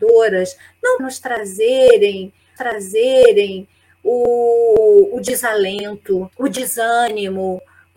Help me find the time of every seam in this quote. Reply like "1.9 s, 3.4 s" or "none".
1.0 s, 2.6 s, 6.3 s